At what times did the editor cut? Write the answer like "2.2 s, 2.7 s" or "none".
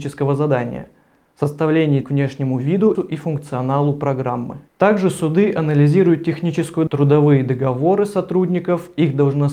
2.0 s, 2.9 s, 4.7 s, 6.9 s